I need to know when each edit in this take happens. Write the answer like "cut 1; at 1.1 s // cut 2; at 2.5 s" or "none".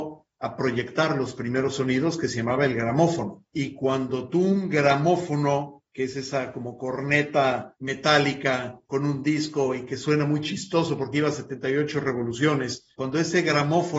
cut 1; at 8.8 s